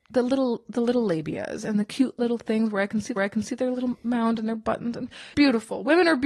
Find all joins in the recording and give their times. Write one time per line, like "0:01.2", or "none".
0:03.2
0:05.3